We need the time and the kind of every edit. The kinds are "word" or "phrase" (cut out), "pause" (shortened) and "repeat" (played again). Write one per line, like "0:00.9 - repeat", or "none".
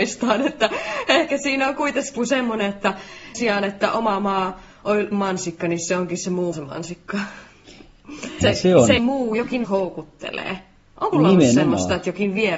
0:02.2 - word
0:03.3 - word
0:05.1 - word
0:06.5 - word
0:08.4 - word
0:09.0 - word
0:09.6 - word
0:11.1 - word

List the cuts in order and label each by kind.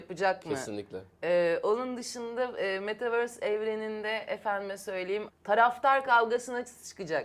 0:05.3 - word

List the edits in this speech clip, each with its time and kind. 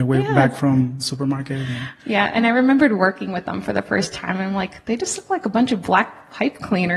none

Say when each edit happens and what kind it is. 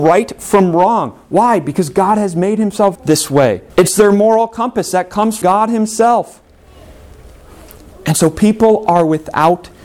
0:03.0 - word
0:03.7 - pause
0:05.4 - word

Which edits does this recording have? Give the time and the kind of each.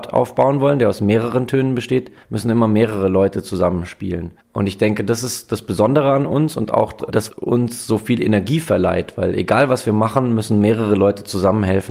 0:02.2 - pause
0:07.3 - word

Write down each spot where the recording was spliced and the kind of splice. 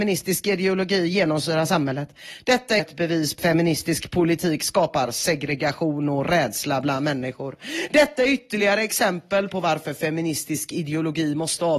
0:02.8 - word
0:03.4 - word

